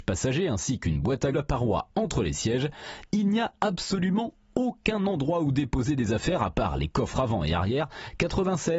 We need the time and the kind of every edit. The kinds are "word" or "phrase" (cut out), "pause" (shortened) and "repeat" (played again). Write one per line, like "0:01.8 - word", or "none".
0:01.3 - phrase